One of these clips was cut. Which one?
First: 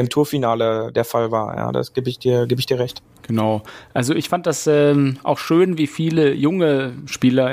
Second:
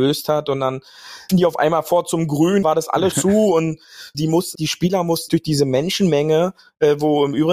second; 6 cuts; at 1.3 s, 2.6 s, 3.1 s, 4.1 s, 4.5 s, 5.3 s

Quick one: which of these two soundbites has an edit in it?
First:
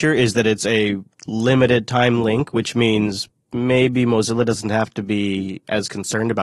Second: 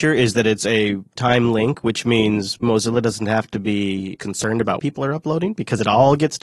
second; 4 cuts; at 1.2 s, 2.6 s, 4.2 s, 4.8 s

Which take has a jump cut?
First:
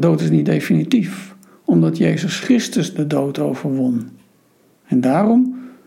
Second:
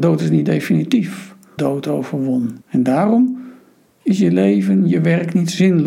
second; 2 cuts; at 1.6 s, 2.6 s

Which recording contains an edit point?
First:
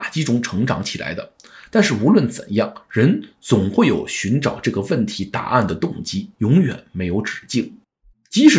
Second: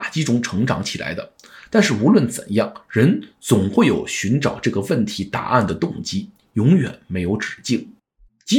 first; 1 cut; at 6.3 s

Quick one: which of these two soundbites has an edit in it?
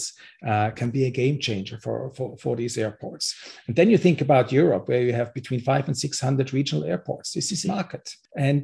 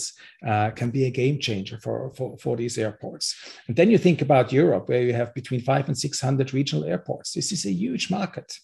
first; 1 cut; at 7.6 s

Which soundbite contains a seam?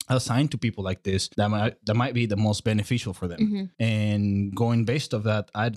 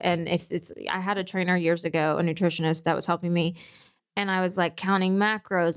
first; 2 cuts; at 1.3 s, 3.7 s

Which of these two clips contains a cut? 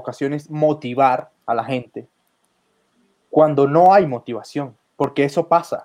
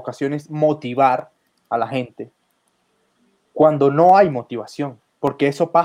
first; 1 cut; at 1.4 s

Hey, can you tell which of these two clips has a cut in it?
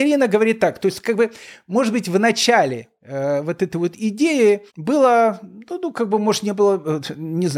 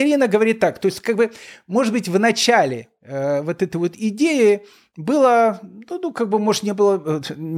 first; 1 cut; at 4.7 s

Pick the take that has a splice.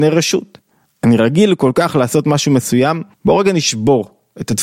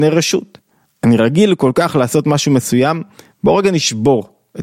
first; 1 cut; at 3.1 s

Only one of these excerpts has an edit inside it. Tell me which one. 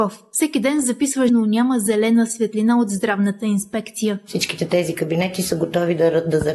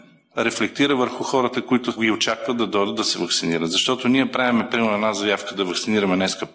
first; 1 cut; at 1.3 s

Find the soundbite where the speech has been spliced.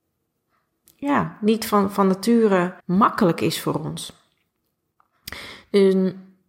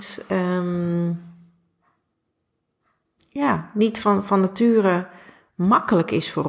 first; 1 cut; at 2.8 s

